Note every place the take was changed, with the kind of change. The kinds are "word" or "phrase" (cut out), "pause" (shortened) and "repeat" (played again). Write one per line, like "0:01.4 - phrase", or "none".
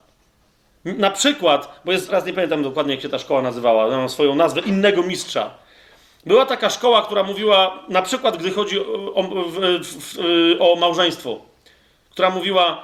0:02.1 - word